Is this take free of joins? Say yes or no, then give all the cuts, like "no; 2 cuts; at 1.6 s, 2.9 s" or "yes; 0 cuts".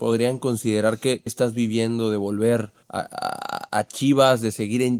no; 2 cuts; at 1.3 s, 2.8 s